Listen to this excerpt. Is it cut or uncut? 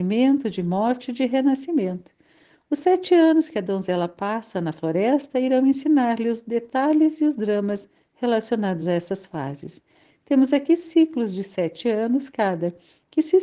uncut